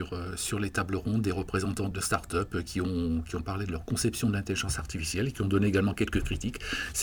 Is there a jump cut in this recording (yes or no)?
yes